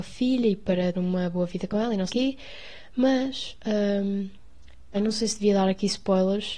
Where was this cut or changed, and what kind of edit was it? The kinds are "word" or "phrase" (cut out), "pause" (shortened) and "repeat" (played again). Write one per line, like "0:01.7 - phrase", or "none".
0:00.9 - word
0:02.1 - word
0:04.9 - word